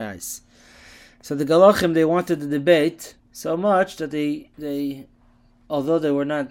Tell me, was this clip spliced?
yes; 2 cuts; at 3.2 s, 4.5 s

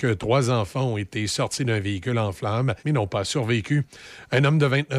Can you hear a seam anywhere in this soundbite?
yes; 1 cut; at 2.8 s

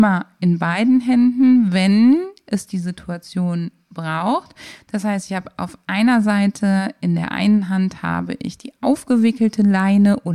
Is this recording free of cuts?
yes; 0 cuts

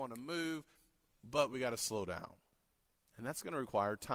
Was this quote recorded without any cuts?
yes; 0 cuts

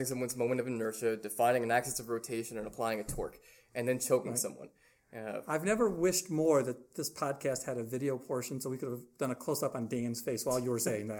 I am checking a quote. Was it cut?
no; 0 cuts

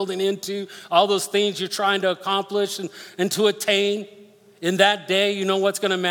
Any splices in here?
no; 0 cuts

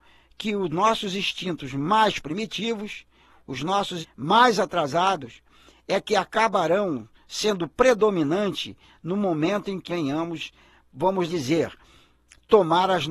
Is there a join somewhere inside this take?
yes; 3 cuts; at 4.0 s, 9.9 s, 11.3 s

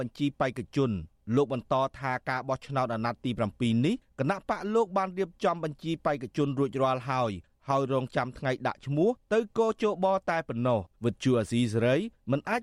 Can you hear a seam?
yes; 1 cut; at 10.9 s

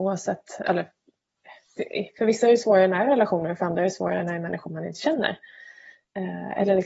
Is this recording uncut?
yes; 0 cuts

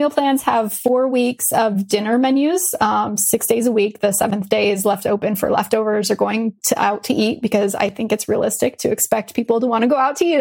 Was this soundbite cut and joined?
no; 0 cuts

